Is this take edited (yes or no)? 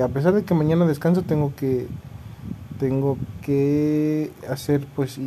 no